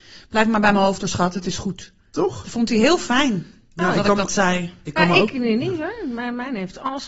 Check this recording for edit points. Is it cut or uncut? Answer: uncut